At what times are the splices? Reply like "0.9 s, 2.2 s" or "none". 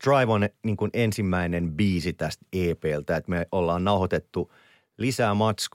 none